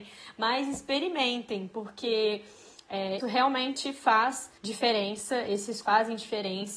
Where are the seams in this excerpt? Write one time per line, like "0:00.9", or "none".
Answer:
0:03.2
0:04.6
0:05.8